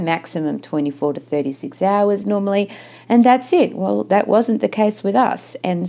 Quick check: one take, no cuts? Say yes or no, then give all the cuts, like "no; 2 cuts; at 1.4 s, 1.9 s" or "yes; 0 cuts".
yes; 0 cuts